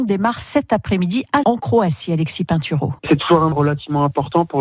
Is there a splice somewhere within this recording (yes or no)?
yes